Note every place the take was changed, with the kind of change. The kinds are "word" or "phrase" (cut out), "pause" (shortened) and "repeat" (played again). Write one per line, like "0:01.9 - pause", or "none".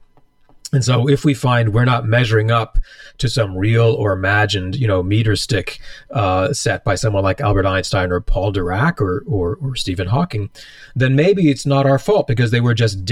none